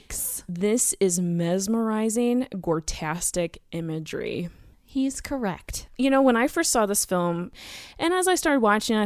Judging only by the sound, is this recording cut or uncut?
uncut